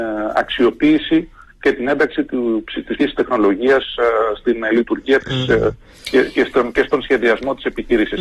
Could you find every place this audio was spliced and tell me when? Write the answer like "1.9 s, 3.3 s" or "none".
3.0 s